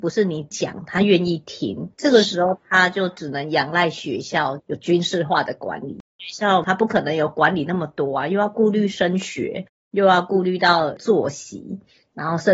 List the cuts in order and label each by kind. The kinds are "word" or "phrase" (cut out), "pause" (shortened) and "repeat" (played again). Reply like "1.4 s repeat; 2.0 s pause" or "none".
1.9 s pause; 6.1 s pause